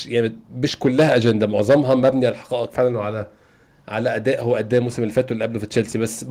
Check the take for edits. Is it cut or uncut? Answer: uncut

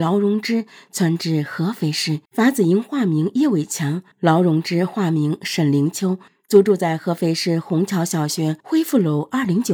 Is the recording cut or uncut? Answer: cut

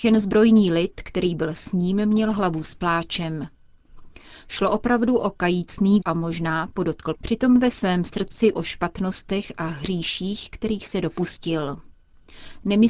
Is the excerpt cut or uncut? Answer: cut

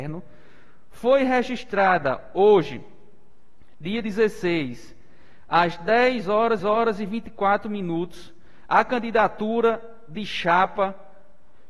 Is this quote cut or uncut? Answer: cut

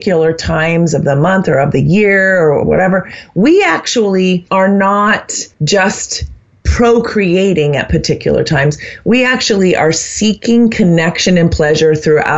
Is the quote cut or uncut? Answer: cut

